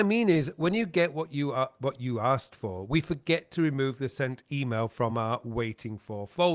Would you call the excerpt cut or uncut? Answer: uncut